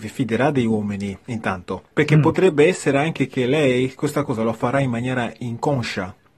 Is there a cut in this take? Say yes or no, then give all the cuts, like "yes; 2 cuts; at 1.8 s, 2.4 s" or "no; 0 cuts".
no; 0 cuts